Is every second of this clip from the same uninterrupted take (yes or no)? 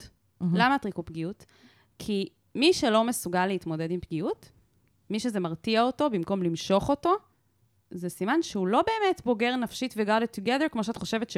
yes